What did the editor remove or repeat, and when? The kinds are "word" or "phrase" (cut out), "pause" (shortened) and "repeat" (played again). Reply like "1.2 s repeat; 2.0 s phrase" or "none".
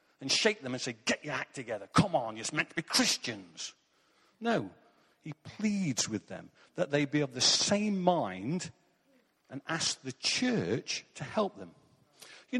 none